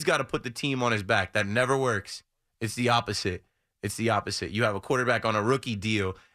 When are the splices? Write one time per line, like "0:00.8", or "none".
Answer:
none